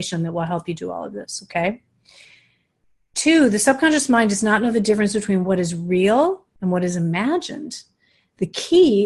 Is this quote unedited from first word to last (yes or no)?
yes